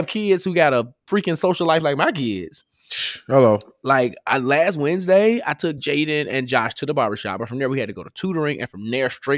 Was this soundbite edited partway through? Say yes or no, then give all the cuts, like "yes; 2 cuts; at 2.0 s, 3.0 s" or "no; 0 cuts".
no; 0 cuts